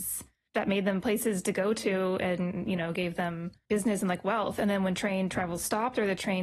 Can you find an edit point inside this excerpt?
no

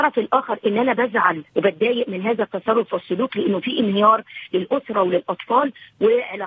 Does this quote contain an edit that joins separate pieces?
yes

